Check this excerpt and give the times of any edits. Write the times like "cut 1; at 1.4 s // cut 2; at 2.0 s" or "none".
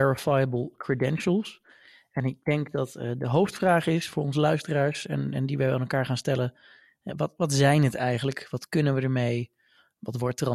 none